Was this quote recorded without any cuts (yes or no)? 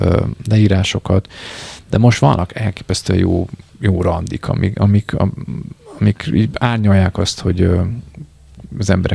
yes